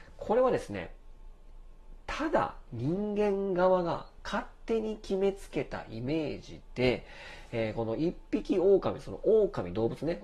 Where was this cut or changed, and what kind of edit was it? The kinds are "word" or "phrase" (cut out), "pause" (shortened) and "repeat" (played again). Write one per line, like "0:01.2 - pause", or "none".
none